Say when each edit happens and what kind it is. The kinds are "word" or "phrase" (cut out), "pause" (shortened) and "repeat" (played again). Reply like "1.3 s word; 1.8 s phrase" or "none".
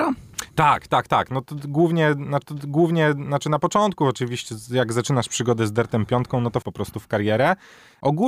2.4 s repeat; 6.6 s word